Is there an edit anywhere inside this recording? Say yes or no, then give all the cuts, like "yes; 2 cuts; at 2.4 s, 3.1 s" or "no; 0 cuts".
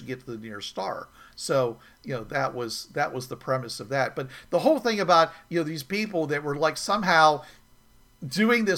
no; 0 cuts